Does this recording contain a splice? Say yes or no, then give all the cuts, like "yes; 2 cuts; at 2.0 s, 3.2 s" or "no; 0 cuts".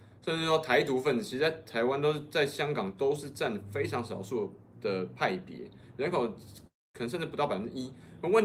no; 0 cuts